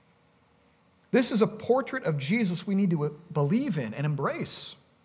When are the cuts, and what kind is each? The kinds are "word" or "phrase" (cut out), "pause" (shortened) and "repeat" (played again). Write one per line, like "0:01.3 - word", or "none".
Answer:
none